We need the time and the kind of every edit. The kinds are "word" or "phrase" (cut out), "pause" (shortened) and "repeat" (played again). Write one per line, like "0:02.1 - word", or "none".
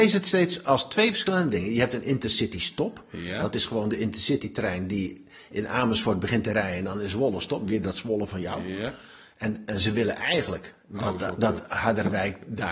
none